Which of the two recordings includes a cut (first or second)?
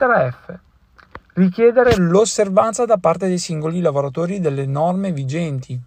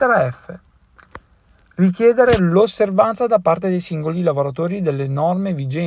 first